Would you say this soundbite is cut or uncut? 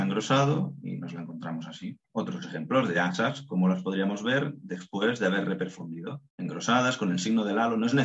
cut